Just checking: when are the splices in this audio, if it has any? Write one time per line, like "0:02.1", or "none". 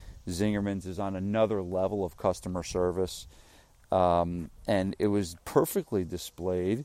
none